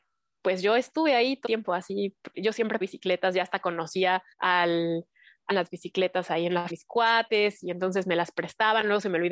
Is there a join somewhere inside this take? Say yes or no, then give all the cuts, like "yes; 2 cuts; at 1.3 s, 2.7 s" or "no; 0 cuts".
yes; 6 cuts; at 1.5 s, 2.3 s, 2.8 s, 4.3 s, 5.5 s, 6.7 s